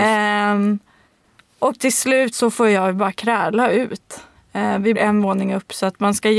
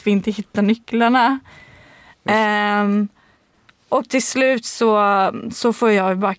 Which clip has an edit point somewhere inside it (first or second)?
first